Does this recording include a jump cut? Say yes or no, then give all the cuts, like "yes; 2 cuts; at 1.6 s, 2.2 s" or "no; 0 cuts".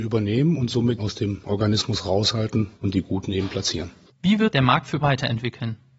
yes; 5 cuts; at 1.0 s, 2.7 s, 4.0 s, 4.5 s, 5.0 s